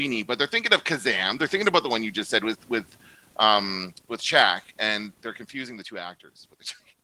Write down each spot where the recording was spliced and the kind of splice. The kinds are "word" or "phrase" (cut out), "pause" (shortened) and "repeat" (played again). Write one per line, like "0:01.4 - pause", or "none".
none